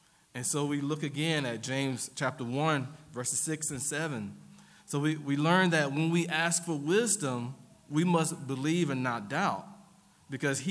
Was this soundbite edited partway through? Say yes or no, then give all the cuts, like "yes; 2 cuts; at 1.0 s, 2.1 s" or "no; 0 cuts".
no; 0 cuts